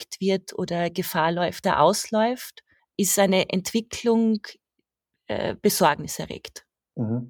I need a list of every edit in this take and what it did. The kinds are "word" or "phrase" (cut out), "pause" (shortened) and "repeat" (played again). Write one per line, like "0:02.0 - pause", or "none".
0:01.6 - phrase
0:02.8 - pause